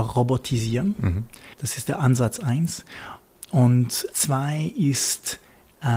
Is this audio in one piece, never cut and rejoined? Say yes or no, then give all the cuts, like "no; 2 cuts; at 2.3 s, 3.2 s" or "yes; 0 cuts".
no; 2 cuts; at 1.5 s, 4.1 s